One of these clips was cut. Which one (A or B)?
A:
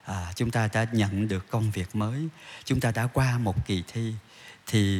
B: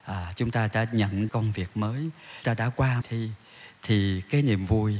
B